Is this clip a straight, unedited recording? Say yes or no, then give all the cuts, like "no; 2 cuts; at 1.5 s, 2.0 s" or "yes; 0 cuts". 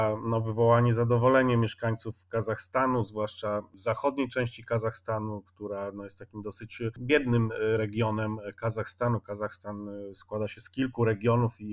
yes; 0 cuts